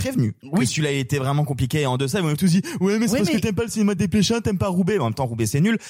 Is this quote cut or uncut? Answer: uncut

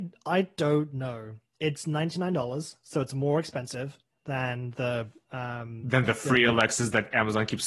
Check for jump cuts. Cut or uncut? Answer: uncut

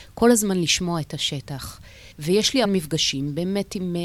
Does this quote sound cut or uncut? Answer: cut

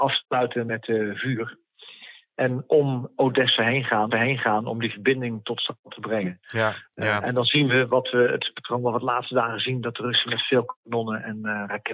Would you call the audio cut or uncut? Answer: cut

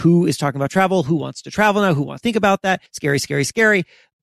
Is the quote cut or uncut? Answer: cut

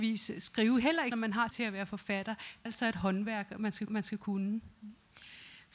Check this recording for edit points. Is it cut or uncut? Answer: cut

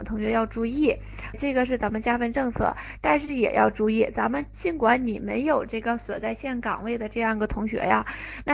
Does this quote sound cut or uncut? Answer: cut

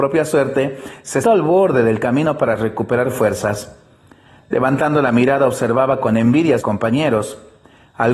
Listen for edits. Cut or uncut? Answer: cut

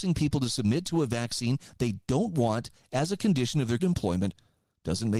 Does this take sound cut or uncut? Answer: cut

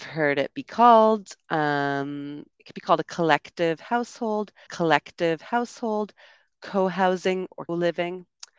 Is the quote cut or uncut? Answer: cut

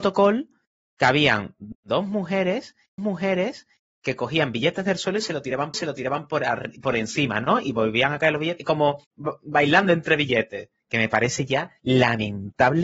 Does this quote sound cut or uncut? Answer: cut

